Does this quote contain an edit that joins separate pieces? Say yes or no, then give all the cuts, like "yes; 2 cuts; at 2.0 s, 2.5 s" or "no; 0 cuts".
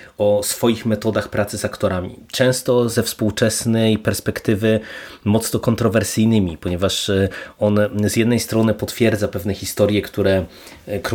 no; 0 cuts